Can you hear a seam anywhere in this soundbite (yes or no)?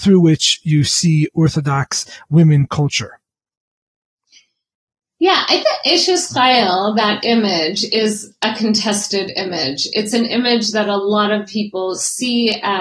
yes